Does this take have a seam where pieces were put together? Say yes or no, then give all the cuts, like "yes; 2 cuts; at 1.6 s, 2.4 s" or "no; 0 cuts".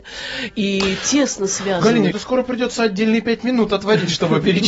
yes; 1 cut; at 2.1 s